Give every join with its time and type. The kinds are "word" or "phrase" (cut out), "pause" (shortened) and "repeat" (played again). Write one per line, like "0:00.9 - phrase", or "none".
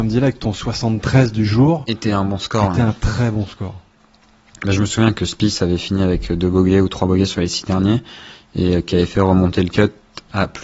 none